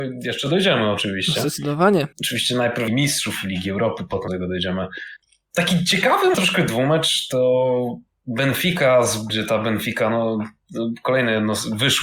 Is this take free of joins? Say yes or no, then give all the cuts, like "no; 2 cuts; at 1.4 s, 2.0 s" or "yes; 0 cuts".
no; 7 cuts; at 2.1 s, 2.9 s, 4.3 s, 5.2 s, 6.3 s, 8.1 s, 9.3 s